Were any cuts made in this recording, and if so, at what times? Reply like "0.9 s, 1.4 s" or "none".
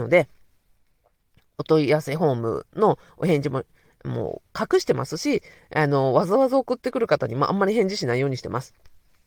none